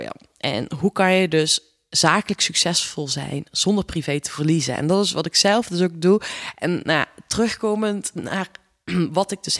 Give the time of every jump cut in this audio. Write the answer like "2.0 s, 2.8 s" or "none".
none